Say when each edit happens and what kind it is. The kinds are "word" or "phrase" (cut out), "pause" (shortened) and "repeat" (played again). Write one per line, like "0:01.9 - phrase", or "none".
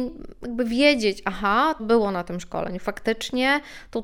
0:01.8 - word